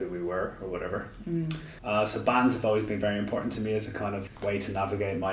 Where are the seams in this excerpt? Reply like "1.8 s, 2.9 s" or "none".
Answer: none

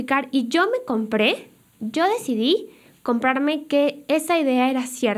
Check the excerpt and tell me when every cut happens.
none

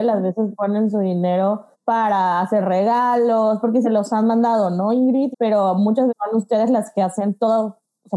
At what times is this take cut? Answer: 1.7 s, 3.8 s, 5.3 s, 6.1 s

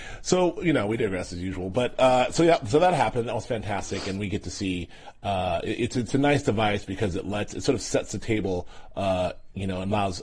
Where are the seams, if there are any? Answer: none

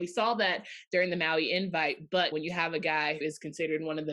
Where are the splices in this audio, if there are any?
2.3 s, 3.2 s

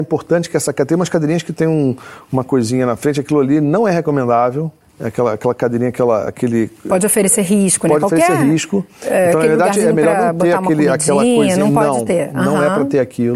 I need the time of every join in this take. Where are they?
4.8 s

